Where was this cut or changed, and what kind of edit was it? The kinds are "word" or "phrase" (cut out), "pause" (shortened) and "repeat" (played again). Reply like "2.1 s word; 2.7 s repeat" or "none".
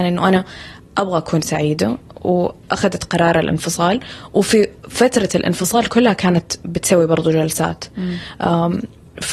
4.8 s pause